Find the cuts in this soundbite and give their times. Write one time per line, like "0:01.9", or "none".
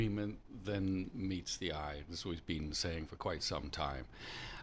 none

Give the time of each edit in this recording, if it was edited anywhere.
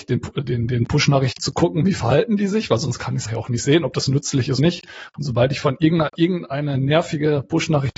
0:01.4
0:03.3
0:04.6
0:06.1

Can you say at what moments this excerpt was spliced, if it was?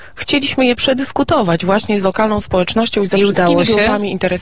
none

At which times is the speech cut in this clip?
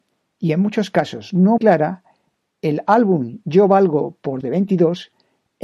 0:01.6
0:04.4

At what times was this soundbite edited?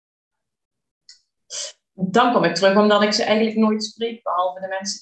none

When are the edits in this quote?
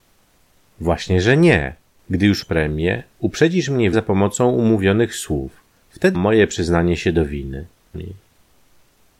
0:02.4
0:03.9
0:06.1
0:07.9

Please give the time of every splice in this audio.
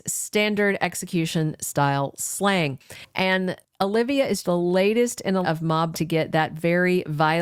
0:04.4
0:05.4
0:05.9

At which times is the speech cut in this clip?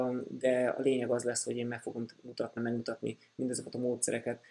0:02.6

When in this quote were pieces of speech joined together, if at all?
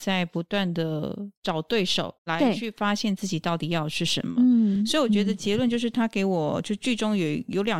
0:02.2

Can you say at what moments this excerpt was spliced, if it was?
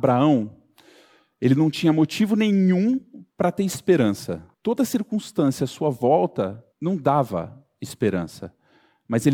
0:03.3
0:04.5
0:06.7

